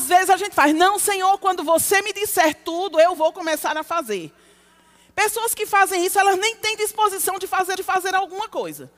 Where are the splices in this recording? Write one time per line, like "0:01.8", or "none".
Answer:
0:07.8